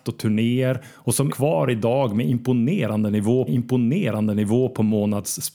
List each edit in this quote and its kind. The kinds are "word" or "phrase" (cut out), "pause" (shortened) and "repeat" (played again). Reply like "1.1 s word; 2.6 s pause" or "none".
1.3 s word; 3.5 s repeat